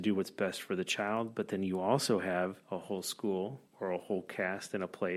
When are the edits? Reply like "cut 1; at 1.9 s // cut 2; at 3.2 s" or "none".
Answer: cut 1; at 2.6 s // cut 2; at 3.7 s